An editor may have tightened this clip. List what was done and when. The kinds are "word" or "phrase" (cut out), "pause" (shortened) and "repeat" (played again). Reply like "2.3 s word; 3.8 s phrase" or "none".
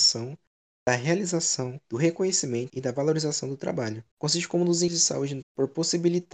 1.8 s pause; 2.7 s phrase; 4.1 s pause; 4.9 s word; 5.4 s word